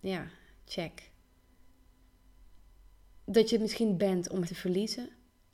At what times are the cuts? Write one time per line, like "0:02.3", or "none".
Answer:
0:04.0
0:04.4